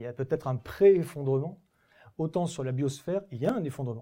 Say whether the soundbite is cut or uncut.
uncut